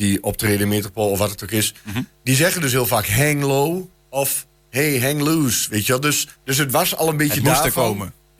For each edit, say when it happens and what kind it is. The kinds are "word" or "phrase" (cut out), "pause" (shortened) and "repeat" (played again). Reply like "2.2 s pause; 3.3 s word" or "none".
6.3 s pause

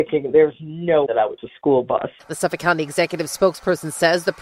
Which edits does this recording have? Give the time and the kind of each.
1.1 s word; 1.4 s word

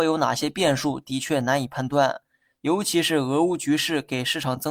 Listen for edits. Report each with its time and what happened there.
none

